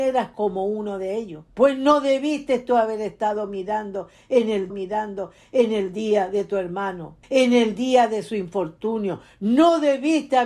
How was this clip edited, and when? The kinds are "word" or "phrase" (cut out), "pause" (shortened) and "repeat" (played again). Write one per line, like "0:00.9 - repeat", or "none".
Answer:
0:01.5 - pause
0:04.7 - repeat
0:07.2 - pause